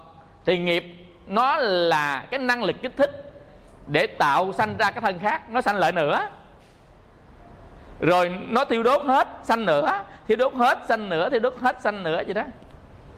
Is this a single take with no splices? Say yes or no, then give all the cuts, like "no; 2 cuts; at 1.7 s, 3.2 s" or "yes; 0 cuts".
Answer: yes; 0 cuts